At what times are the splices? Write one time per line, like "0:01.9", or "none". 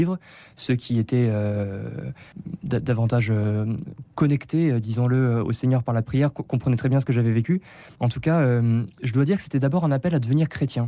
none

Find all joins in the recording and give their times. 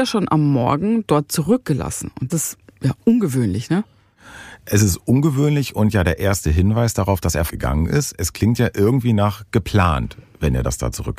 0:02.3
0:07.5

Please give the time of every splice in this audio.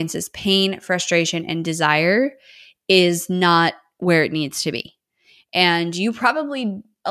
none

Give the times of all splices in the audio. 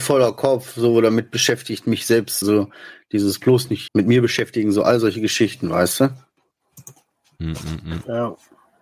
0:02.4
0:03.9

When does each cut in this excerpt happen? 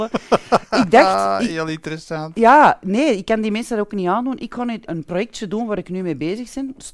0:04.9

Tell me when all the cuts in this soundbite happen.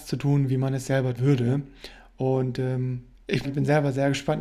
0:01.2
0:03.4

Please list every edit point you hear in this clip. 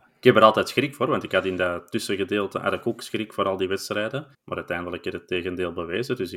0:04.3

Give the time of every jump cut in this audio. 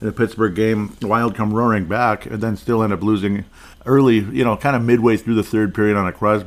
0:03.7

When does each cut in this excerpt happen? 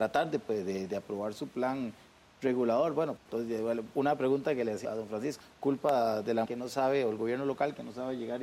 0:03.2
0:04.8
0:05.4
0:06.5

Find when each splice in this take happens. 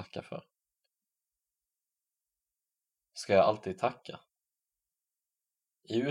none

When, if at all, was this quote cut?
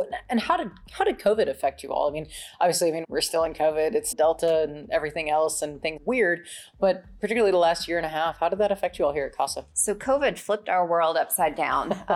0:03.0
0:04.1
0:06.0
0:09.7

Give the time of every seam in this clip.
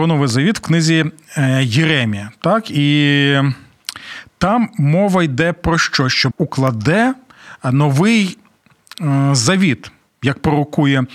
0:06.3

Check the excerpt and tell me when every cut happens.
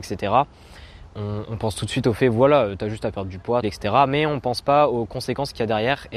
0:03.6

